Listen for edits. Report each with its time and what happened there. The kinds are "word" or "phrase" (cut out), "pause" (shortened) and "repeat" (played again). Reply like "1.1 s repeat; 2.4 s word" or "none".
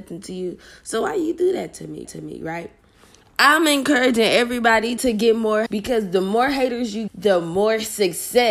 2.0 s repeat; 5.0 s word; 5.7 s word; 7.1 s word